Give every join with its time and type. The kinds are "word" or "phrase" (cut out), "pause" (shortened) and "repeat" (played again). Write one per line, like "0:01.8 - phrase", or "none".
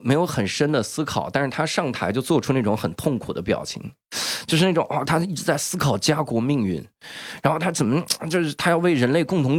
0:05.0 - word